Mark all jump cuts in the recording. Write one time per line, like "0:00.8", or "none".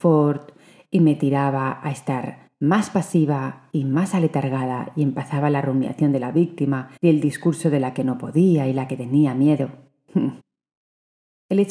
0:02.5
0:07.0
0:10.4